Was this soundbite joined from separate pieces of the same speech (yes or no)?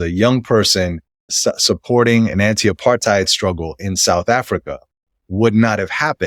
no